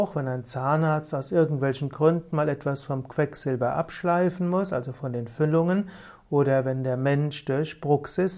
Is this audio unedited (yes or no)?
yes